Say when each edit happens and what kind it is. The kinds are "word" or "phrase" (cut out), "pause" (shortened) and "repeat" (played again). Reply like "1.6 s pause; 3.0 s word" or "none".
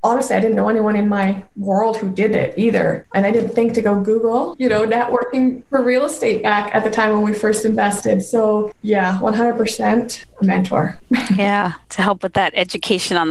none

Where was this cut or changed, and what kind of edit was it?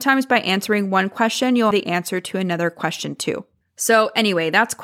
1.7 s word

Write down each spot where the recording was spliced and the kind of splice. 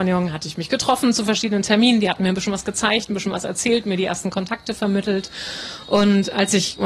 none

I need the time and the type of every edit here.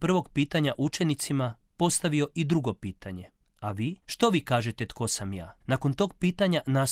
3.4 s pause; 4.0 s pause; 5.6 s pause

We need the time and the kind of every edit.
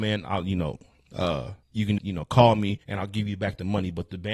1.6 s pause; 2.0 s word; 2.8 s pause

